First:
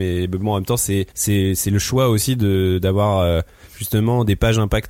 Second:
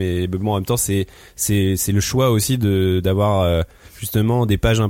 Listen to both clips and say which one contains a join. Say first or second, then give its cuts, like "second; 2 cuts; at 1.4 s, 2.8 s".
first; 1 cut; at 1.1 s